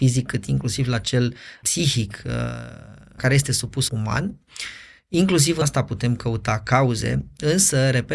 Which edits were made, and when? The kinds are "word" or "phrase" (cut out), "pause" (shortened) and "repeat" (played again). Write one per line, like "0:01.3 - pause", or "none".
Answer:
0:01.6 - word
0:03.2 - word
0:03.9 - word
0:05.6 - word